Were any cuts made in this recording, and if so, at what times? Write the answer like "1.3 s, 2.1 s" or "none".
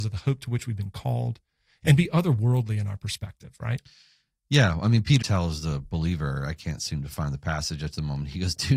5.2 s

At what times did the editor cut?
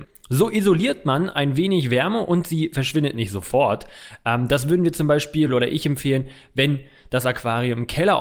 none

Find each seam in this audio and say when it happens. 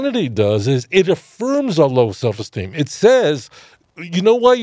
none

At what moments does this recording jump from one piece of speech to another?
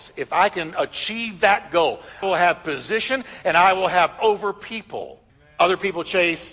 2.2 s, 4.2 s, 5.3 s

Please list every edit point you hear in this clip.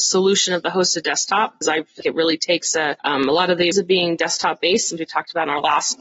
1.6 s, 2.0 s, 3.0 s, 3.7 s, 5.0 s

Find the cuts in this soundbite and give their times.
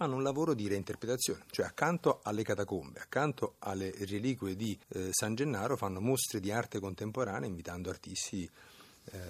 4.8 s

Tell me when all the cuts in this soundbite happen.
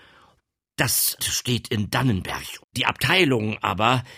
1.2 s, 2.6 s

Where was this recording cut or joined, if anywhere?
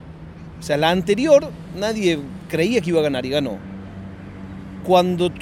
none

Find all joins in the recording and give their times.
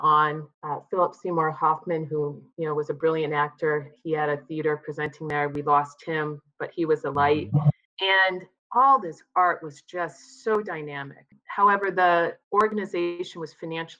2.5 s, 12.4 s

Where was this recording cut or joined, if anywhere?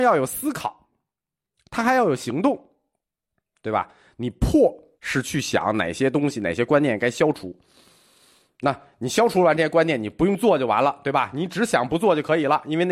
4.9 s

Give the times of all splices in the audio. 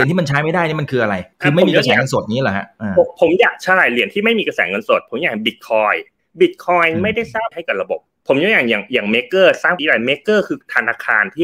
1.3 s, 7.5 s, 9.8 s

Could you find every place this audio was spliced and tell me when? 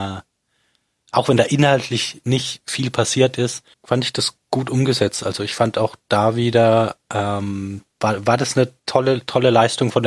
3.7 s, 6.0 s, 7.9 s, 8.8 s

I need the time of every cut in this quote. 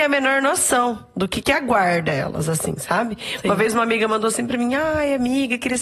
none

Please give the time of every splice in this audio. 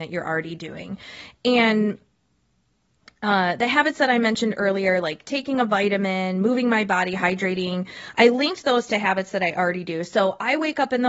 none

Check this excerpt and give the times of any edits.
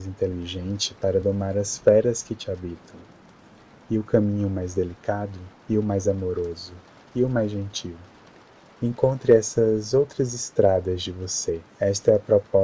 none

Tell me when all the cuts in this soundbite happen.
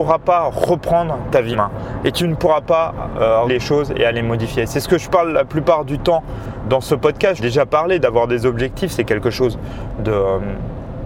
1.5 s, 3.5 s, 6.6 s, 7.4 s

